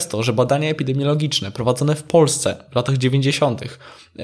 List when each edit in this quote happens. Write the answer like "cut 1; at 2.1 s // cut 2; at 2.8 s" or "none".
none